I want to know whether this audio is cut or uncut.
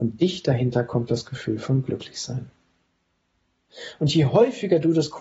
uncut